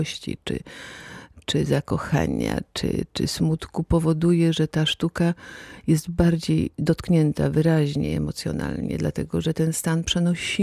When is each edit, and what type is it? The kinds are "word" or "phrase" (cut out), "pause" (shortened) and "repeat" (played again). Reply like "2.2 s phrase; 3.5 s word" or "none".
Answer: none